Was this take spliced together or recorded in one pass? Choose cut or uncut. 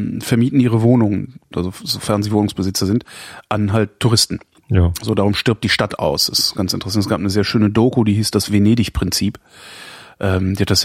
uncut